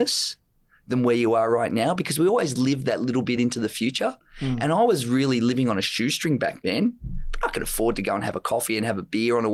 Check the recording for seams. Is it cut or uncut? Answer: uncut